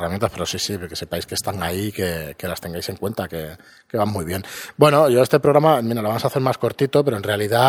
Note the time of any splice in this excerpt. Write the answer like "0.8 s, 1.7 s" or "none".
none